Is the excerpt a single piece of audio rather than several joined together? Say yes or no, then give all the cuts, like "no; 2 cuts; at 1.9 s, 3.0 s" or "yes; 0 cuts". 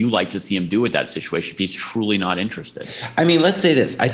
yes; 0 cuts